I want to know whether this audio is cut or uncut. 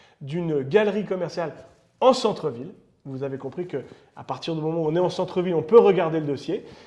uncut